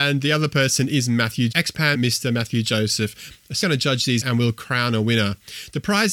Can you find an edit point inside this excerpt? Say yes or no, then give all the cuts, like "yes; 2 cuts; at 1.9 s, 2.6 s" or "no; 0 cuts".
yes; 4 cuts; at 1.5 s, 1.9 s, 3.6 s, 4.2 s